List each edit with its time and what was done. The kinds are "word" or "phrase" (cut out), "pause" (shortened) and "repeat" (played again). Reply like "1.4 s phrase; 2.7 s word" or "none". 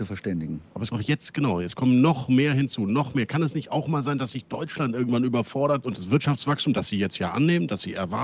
0.9 s word